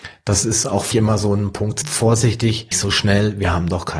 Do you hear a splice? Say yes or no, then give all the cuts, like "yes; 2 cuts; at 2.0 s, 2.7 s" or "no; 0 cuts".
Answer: yes; 3 cuts; at 0.9 s, 1.8 s, 2.7 s